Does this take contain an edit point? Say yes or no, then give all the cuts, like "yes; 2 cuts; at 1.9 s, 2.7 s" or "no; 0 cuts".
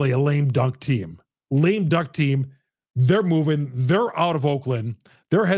no; 0 cuts